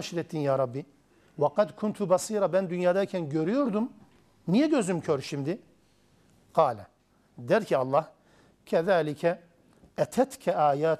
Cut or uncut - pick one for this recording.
uncut